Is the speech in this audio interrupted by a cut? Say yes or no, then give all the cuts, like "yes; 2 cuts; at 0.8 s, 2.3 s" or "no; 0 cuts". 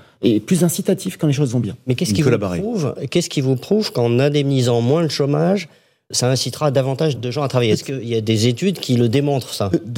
yes; 2 cuts; at 6.1 s, 7.2 s